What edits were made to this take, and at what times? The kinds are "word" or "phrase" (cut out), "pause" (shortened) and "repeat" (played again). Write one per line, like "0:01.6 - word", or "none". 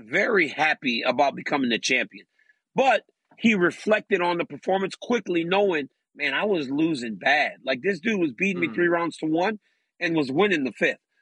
none

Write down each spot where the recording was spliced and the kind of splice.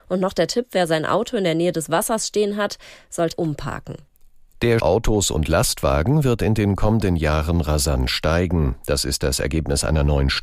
0:03.3 - phrase
0:04.8 - phrase

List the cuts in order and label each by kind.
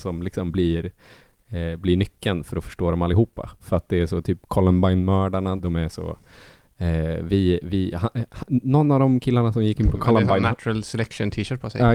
0:05.6 - word

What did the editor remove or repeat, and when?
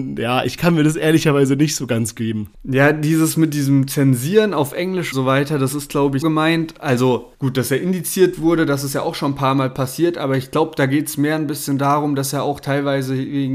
0:02.5 - pause
0:05.1 - word
0:06.2 - word
0:07.3 - pause

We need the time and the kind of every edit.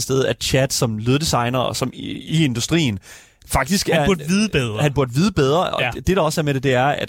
none

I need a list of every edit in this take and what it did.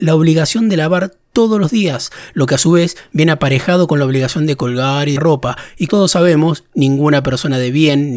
0:05.2 - word
0:05.9 - word

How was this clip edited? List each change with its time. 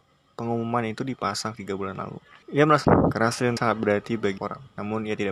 0:01.5 - word
0:02.4 - pause
0:02.8 - word
0:03.6 - word
0:04.4 - word

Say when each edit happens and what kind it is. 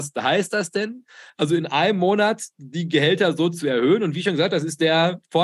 none

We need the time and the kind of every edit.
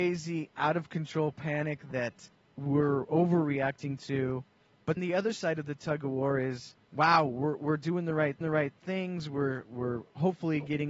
0:02.3 - pause
0:05.0 - word
0:06.8 - pause
0:08.4 - repeat
0:09.6 - word

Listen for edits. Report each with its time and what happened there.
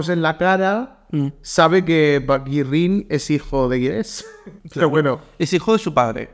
0:04.6 - pause

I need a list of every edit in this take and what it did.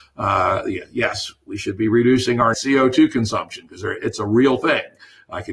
0:02.5 - word

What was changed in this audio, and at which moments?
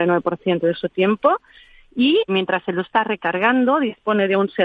0:02.3 - word
0:02.8 - word

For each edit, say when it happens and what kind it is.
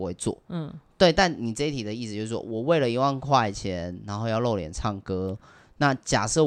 none

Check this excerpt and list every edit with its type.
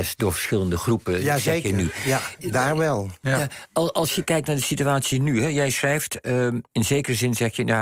0:06.7 - pause

